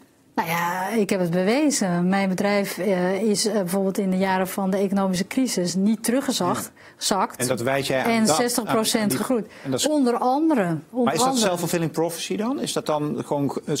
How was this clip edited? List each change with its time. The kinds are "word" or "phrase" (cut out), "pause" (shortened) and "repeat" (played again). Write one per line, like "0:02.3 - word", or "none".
none